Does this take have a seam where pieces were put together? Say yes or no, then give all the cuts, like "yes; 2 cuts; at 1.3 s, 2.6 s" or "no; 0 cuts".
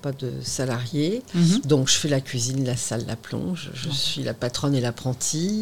no; 0 cuts